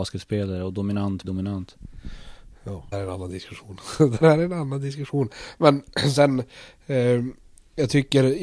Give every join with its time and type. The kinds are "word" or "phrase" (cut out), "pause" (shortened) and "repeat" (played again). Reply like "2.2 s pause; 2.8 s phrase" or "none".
1.2 s word; 2.9 s word; 4.2 s word